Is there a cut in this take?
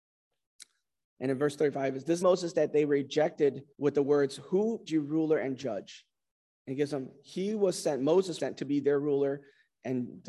yes; 4 cuts; at 2.2 s, 3.7 s, 4.9 s, 8.4 s

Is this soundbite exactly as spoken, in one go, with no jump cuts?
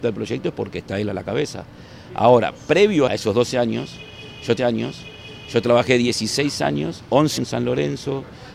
no; 3 cuts; at 3.1 s, 4.6 s, 7.4 s

